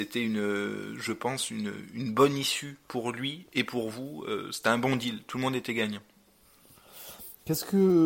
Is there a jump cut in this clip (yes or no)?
no